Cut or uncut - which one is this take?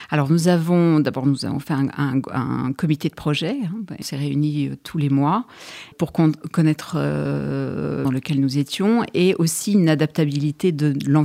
cut